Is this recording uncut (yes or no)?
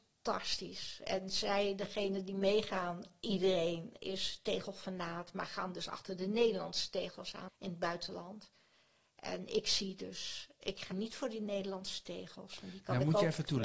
no